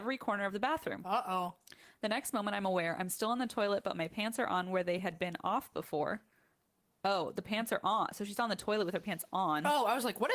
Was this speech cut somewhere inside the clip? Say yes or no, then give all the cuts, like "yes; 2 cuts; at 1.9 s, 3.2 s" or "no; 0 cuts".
no; 0 cuts